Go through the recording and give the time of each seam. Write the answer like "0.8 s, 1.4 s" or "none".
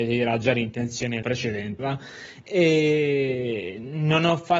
1.2 s, 1.8 s